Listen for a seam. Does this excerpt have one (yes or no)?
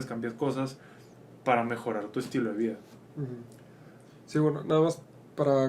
no